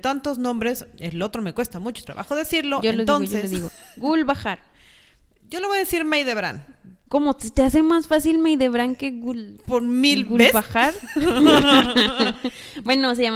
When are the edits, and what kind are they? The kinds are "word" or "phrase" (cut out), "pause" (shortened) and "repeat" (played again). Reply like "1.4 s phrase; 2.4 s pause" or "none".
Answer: none